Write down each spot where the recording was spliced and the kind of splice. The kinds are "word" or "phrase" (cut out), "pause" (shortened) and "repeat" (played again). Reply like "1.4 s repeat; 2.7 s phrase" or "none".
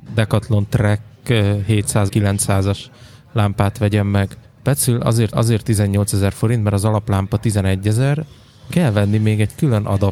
2.1 s word; 4.4 s pause; 5.3 s repeat; 8.7 s word

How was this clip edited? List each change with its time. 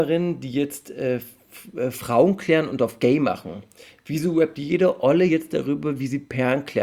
none

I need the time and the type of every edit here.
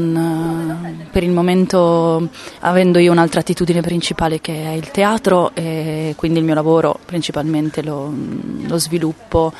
7.0 s pause

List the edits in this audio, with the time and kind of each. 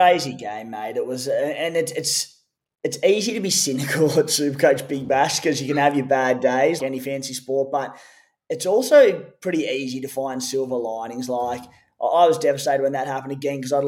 6.8 s word

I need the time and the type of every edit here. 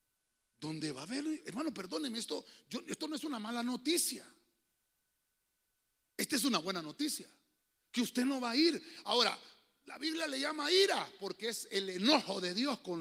none

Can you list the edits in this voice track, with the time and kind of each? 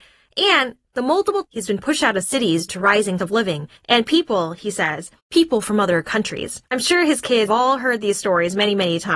1.4 s word; 2.7 s word; 3.2 s word; 3.8 s pause; 5.2 s pause; 6.7 s pause; 7.5 s word

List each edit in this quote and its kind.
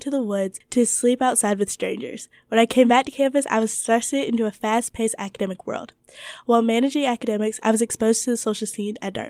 none

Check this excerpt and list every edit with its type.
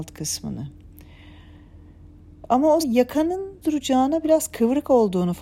2.8 s word; 3.6 s word

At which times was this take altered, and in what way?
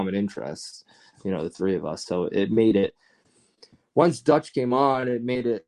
none

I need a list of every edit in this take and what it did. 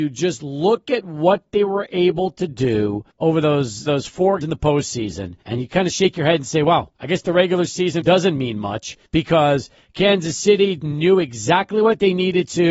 3.1 s pause; 3.9 s phrase; 4.4 s word; 5.4 s pause; 6.9 s pause; 8.0 s word; 9.0 s pause; 10.8 s word

